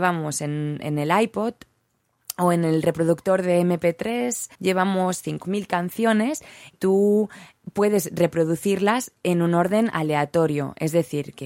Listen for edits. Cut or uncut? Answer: cut